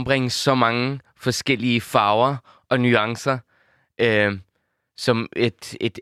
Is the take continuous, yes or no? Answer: yes